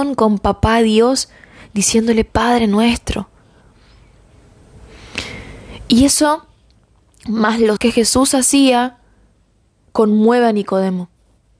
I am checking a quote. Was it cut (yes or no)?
yes